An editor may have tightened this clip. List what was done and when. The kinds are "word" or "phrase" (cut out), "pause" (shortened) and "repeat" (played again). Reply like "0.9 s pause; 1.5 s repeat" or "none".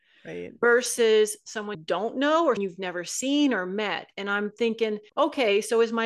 1.7 s word; 2.6 s word; 5.1 s pause